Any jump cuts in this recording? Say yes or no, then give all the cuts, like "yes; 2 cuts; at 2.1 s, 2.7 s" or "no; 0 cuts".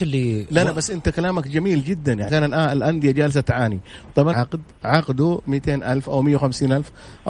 yes; 2 cuts; at 2.3 s, 4.3 s